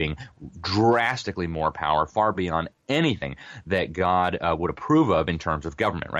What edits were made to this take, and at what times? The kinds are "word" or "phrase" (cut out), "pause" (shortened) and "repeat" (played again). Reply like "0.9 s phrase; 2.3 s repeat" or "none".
none